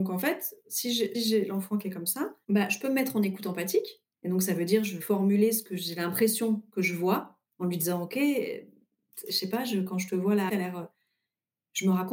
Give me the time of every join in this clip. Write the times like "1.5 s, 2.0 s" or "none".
1.1 s, 4.1 s, 5.0 s, 7.5 s, 10.5 s

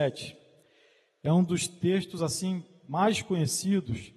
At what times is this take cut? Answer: none

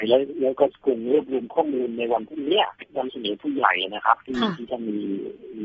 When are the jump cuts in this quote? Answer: 2.8 s

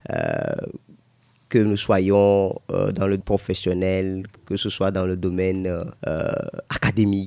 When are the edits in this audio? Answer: 3.2 s, 6.0 s

